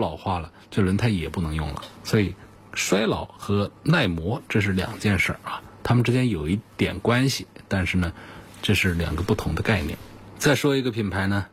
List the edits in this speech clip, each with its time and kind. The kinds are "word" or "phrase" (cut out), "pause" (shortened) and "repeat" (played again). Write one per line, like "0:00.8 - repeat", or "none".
none